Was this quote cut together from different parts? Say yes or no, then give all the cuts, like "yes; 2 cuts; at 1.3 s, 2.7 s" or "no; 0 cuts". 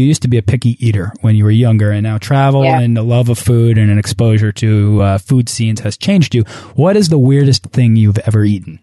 no; 0 cuts